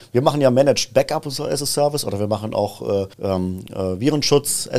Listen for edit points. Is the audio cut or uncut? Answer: cut